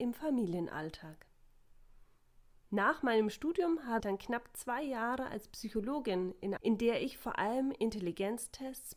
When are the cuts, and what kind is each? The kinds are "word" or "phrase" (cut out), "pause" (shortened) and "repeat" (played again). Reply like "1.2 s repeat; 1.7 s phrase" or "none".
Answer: 4.0 s word; 6.6 s phrase